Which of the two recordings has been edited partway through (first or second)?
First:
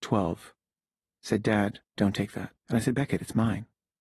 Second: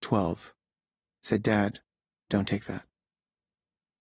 first